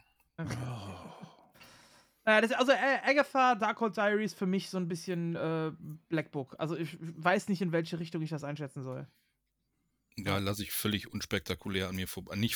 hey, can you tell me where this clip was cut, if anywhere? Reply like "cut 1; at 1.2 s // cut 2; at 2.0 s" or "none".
none

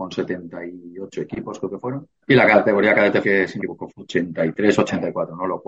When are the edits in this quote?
cut 1; at 2.2 s // cut 2; at 3.2 s // cut 3; at 3.6 s // cut 4; at 3.9 s

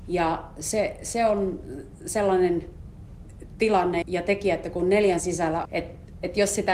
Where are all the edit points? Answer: cut 1; at 4.0 s // cut 2; at 5.2 s // cut 3; at 5.6 s

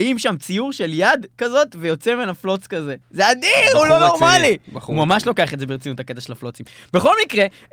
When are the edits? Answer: cut 1; at 3.0 s

